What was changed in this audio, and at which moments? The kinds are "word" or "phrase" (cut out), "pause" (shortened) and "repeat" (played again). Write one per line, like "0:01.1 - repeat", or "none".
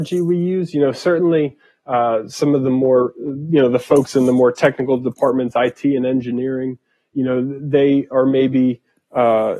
none

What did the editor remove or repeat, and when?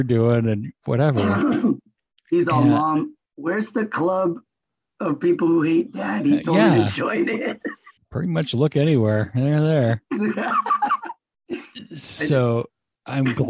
0:08.0 - pause

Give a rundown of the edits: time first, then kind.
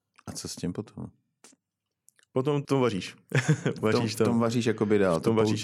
0:02.6 - word

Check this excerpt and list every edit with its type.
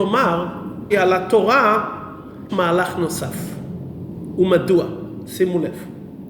0:00.9 - word
0:02.5 - word

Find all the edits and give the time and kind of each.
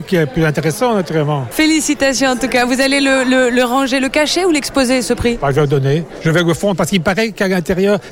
none

